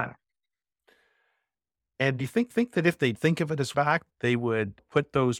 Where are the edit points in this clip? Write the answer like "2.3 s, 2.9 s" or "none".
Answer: 2.5 s, 3.1 s, 3.7 s, 4.1 s